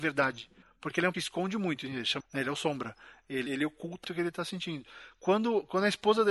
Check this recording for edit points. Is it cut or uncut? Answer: cut